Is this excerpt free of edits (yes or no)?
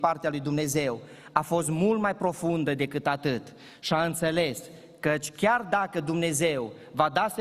yes